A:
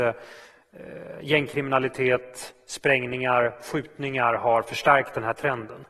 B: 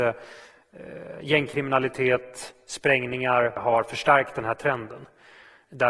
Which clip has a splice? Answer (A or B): B